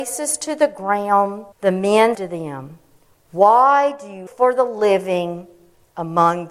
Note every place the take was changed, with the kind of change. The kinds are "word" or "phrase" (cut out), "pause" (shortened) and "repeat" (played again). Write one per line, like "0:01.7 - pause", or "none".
0:01.5 - pause
0:02.1 - word
0:04.3 - word

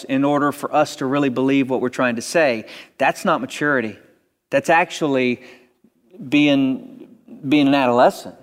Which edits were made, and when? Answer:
none

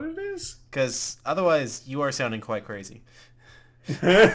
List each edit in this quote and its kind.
none

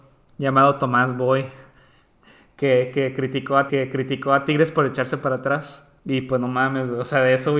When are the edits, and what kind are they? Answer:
0:03.7 - repeat
0:06.0 - pause

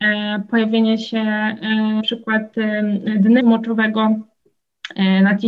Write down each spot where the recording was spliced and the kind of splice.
0:02.0 - word
0:03.4 - phrase

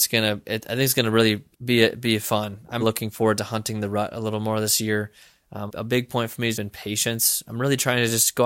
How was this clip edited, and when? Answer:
0:01.5 - pause
0:02.8 - word
0:05.7 - word
0:06.5 - word

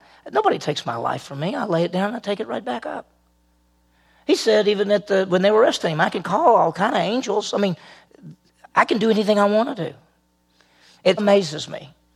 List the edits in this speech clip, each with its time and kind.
0:11.2 - word

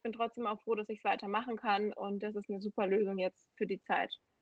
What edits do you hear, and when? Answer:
none

